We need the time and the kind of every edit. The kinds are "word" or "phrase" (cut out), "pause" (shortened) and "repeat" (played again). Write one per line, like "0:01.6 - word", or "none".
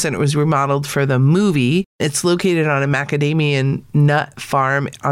none